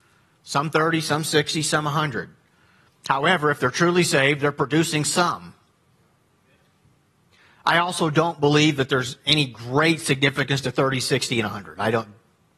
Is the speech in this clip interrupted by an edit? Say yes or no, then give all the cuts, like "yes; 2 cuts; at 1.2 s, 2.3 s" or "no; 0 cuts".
no; 0 cuts